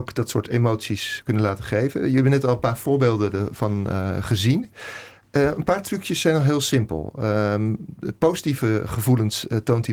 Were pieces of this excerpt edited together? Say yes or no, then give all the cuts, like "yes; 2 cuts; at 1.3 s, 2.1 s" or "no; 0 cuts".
no; 0 cuts